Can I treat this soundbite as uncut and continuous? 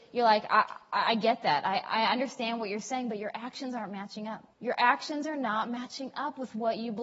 no; 1 cut; at 4.5 s

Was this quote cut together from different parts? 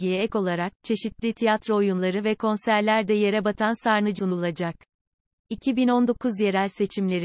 yes; 1 cut; at 4.2 s

